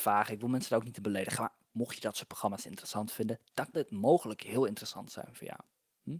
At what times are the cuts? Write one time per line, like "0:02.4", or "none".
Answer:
0:03.7